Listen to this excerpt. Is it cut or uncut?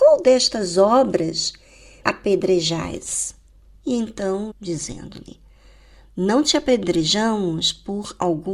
cut